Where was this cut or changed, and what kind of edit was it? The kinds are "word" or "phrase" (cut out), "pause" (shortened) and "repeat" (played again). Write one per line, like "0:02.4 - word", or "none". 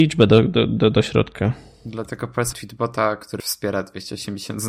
0:02.5 - word
0:03.4 - word